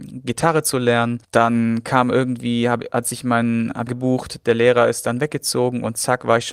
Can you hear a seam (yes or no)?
yes